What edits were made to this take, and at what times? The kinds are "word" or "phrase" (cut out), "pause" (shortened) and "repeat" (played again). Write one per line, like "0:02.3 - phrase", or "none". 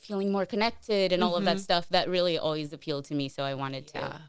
none